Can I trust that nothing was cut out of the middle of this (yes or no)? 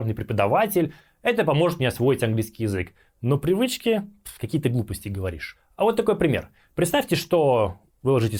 yes